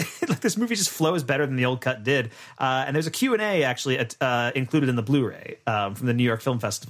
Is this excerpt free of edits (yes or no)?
yes